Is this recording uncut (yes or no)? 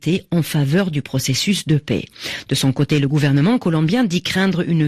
yes